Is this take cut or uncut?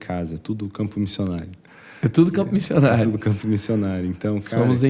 uncut